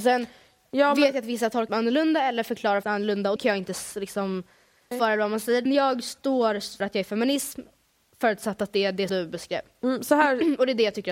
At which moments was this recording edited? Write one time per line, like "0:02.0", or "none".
0:01.7
0:02.8
0:03.4
0:04.9
0:05.7
0:06.8
0:09.1